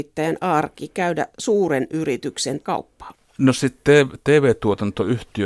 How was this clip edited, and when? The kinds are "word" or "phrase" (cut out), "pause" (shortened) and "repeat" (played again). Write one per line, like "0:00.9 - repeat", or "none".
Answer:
0:01.3 - word
0:02.6 - phrase